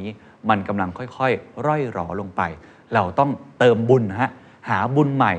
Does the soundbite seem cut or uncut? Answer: uncut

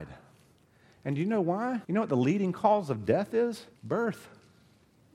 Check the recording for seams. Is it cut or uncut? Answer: cut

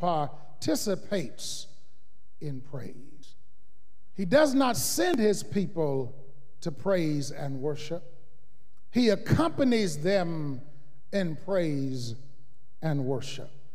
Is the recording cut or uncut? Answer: uncut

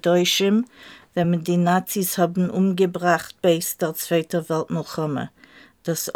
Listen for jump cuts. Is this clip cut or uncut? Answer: uncut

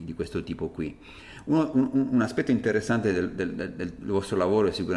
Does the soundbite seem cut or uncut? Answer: uncut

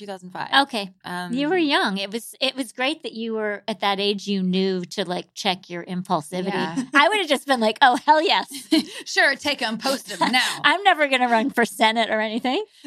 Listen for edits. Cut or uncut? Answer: uncut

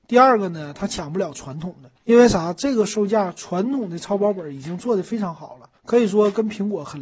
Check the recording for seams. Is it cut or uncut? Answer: cut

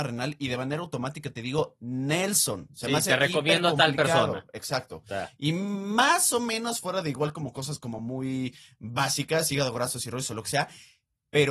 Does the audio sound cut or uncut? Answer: uncut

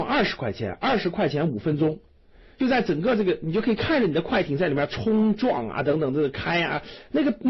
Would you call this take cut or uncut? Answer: uncut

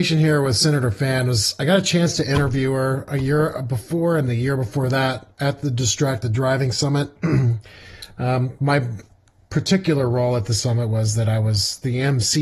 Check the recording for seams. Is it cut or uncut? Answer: uncut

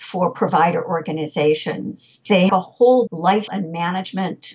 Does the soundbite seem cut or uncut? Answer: cut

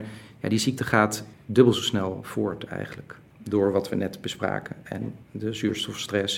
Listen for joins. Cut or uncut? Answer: cut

